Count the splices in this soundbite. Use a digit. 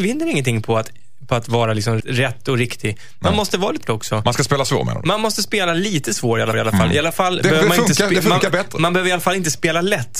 4